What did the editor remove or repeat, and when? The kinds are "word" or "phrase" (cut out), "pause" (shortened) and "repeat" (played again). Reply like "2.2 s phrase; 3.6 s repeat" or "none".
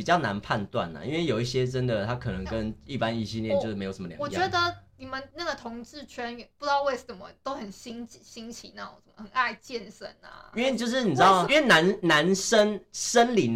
4.9 s pause; 5.3 s pause; 11.5 s word